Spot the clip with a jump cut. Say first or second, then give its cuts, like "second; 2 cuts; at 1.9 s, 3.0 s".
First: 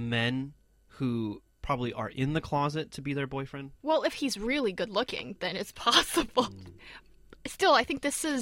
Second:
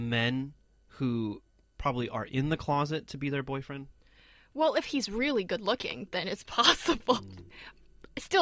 first; 2 cuts; at 1.5 s, 3.8 s